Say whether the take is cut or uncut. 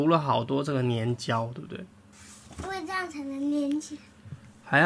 cut